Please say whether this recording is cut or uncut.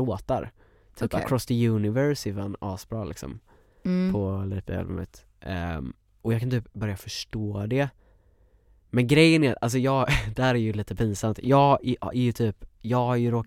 uncut